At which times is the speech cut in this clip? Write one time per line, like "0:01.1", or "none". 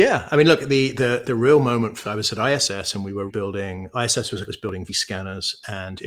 0:01.2
0:02.0
0:03.3
0:04.5
0:04.9